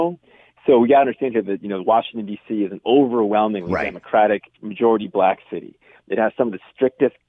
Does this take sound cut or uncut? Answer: uncut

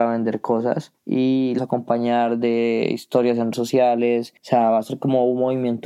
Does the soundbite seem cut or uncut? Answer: cut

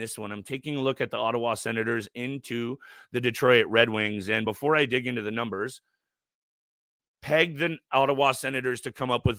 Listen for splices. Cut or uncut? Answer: uncut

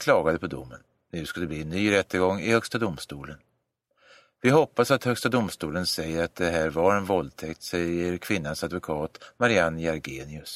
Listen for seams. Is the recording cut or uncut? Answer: uncut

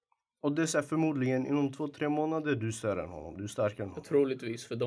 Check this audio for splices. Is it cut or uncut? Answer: uncut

